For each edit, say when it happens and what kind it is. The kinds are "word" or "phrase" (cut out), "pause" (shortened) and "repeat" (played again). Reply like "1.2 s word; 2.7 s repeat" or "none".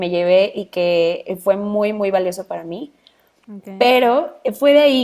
none